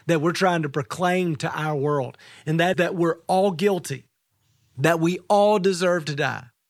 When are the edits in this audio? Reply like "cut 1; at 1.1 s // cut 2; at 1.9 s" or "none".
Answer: cut 1; at 2.7 s